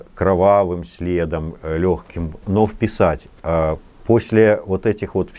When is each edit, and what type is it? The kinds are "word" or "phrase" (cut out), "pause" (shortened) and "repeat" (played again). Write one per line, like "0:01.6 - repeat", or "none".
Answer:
0:02.4 - word